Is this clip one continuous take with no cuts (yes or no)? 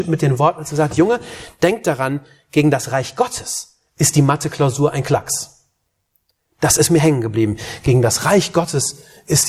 yes